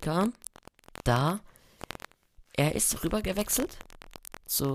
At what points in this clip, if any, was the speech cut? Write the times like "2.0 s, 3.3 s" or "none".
3.0 s